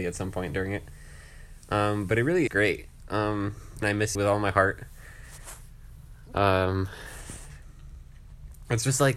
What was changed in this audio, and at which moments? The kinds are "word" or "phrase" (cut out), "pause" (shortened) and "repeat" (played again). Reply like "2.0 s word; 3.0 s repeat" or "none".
2.5 s word; 3.8 s word; 4.1 s word